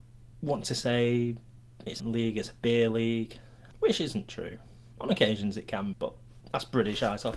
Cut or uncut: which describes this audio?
cut